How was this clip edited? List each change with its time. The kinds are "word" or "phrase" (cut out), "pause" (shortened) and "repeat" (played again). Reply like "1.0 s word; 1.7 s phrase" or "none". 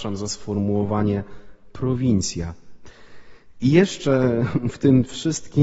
none